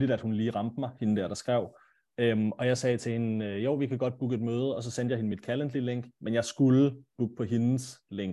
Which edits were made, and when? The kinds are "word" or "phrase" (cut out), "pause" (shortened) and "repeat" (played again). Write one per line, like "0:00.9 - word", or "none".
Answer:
none